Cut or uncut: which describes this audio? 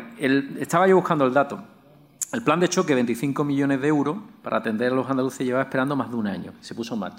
uncut